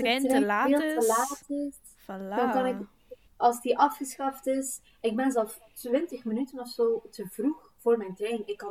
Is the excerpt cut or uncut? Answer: cut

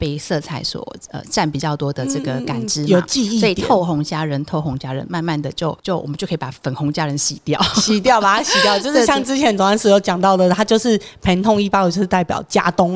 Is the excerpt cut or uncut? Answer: uncut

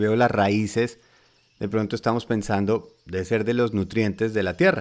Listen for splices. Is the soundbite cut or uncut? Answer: uncut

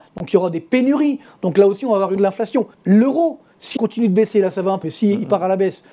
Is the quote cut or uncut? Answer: cut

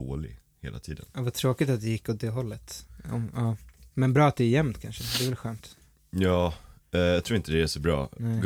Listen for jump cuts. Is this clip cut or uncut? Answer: uncut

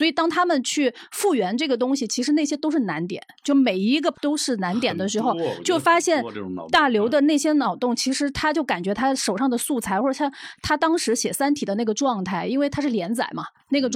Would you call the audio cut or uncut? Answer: cut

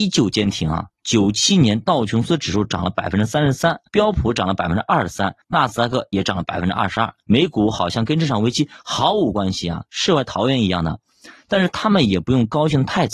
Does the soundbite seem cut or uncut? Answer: cut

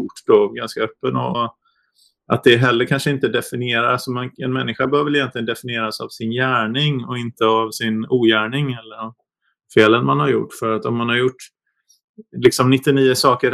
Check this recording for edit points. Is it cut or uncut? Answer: cut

